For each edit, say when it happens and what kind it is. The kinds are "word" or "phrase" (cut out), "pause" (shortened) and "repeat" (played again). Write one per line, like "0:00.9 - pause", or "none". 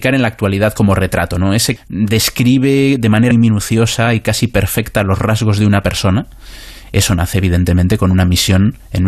0:01.8 - word
0:03.3 - word